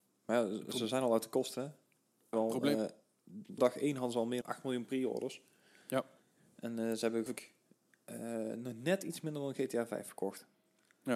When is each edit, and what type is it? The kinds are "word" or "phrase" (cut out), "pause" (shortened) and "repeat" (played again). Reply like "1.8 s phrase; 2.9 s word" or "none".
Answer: 2.3 s word; 3.6 s word; 4.4 s word; 7.3 s word